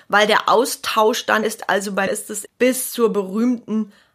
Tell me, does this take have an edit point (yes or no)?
yes